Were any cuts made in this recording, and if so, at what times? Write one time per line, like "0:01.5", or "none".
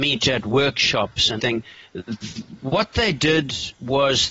0:01.4